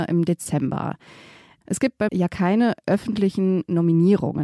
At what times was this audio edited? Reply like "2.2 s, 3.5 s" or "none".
2.1 s